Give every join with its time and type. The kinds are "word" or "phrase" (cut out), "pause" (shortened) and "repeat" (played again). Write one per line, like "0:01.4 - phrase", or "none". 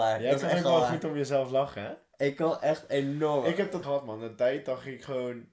0:03.8 - phrase